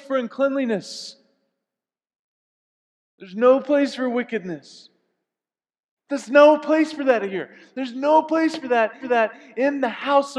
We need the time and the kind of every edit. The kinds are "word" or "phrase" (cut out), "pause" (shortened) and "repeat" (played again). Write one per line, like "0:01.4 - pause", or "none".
0:09.0 - repeat